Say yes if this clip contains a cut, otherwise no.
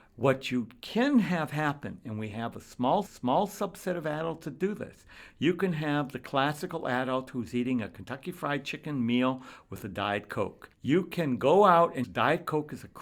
yes